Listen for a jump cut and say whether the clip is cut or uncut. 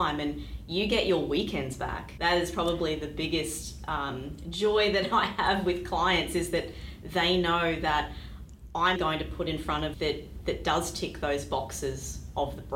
cut